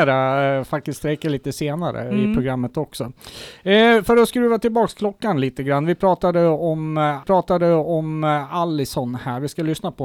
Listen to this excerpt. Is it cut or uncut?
cut